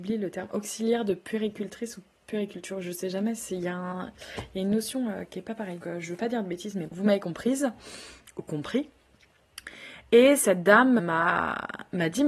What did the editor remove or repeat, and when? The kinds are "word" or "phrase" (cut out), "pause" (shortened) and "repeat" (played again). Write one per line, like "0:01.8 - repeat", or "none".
0:05.8 - word
0:06.9 - word
0:11.0 - word